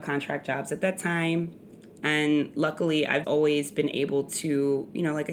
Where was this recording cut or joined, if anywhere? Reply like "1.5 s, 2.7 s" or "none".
3.2 s